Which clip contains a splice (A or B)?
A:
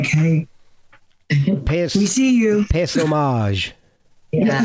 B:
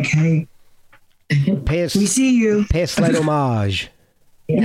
A